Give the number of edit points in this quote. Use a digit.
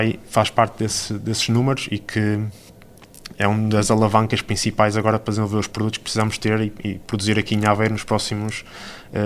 0